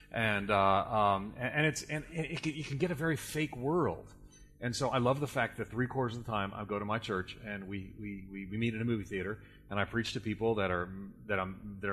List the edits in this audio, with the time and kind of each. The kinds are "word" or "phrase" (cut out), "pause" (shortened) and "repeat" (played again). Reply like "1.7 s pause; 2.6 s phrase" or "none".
none